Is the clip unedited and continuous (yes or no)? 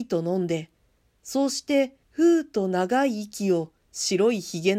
no